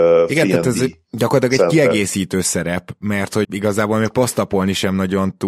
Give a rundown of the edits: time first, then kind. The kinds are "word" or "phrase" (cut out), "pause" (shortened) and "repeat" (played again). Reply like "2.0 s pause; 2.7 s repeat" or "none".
3.4 s word